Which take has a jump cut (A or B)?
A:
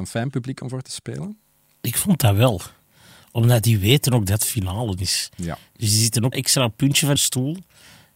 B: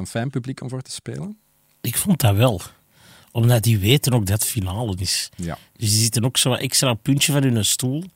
A